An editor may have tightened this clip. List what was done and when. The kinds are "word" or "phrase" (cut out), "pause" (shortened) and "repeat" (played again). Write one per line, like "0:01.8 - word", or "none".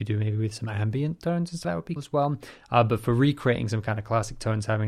0:01.6 - word
0:02.0 - word